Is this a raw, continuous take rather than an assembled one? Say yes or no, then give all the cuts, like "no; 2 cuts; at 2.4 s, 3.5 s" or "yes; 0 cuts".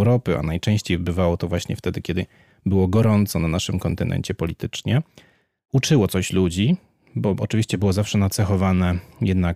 yes; 0 cuts